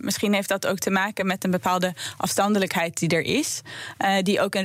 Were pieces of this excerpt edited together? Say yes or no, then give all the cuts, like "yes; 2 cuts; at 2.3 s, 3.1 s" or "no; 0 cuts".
no; 0 cuts